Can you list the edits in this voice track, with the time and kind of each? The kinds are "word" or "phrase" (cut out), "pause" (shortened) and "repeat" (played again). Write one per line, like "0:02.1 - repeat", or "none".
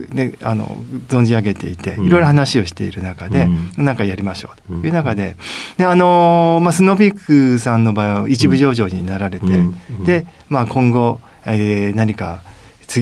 none